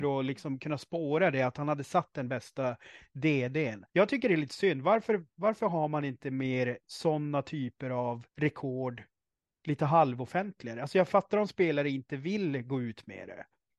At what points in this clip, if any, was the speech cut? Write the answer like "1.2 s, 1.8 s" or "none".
3.9 s, 5.3 s, 6.8 s, 8.3 s